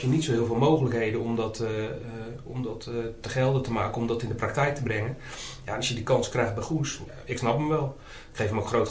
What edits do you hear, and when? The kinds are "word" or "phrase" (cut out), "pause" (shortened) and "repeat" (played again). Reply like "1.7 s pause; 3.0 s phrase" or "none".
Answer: none